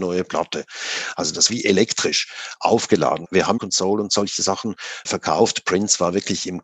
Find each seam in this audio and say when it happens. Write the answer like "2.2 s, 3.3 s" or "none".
1.5 s, 3.2 s, 3.6 s, 5.0 s